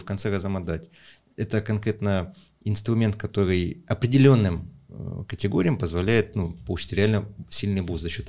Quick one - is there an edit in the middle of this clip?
no; 0 cuts

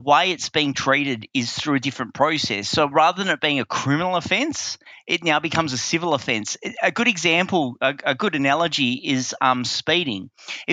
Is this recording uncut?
yes; 0 cuts

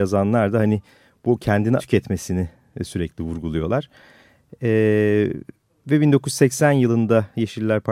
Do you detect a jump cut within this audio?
yes; 1 cut; at 1.8 s

